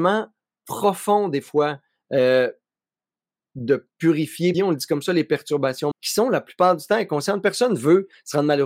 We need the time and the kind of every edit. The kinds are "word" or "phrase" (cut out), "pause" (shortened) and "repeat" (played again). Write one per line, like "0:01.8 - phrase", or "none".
0:04.5 - word
0:05.9 - word

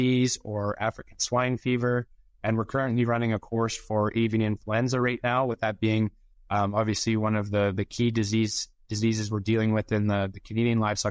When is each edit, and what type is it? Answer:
none

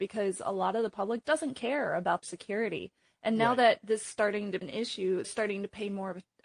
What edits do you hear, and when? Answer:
0:01.2 - word
0:02.2 - word
0:04.1 - word
0:04.6 - word
0:05.2 - word

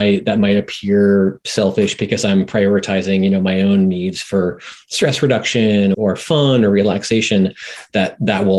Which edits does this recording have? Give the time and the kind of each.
0:05.9 - word

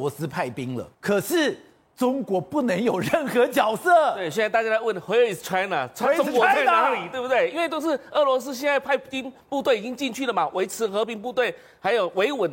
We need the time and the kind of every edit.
0:00.9 - pause

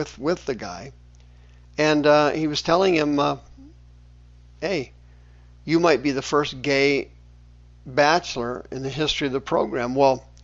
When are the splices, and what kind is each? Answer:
none

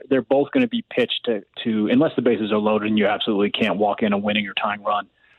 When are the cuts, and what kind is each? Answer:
0:01.5 - pause

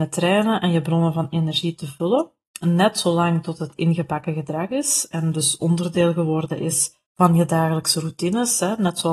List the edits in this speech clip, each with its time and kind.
0:07.1 - pause

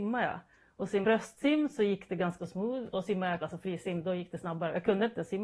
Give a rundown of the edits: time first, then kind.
0:01.0 - word
0:02.4 - word
0:03.4 - word

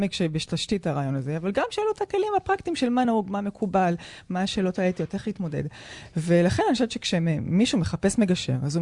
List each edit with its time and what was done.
none

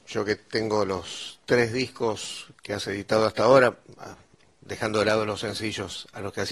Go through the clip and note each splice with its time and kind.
none

